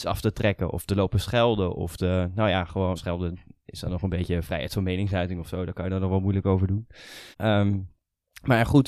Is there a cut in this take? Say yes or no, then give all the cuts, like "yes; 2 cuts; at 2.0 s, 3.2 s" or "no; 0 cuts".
yes; 2 cuts; at 3.0 s, 7.3 s